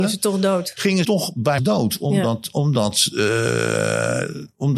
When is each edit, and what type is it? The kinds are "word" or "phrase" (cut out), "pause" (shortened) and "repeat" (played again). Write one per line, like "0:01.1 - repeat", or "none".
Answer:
0:01.0 - word
0:01.6 - word